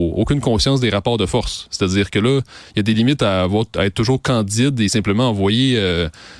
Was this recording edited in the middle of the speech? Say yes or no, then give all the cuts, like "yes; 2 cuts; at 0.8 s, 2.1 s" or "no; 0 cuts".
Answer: no; 0 cuts